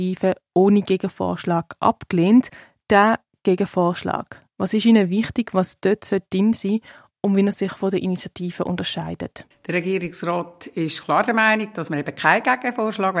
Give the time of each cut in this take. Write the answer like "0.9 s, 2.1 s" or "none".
9.5 s